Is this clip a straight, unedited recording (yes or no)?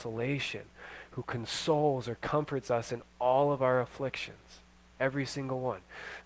yes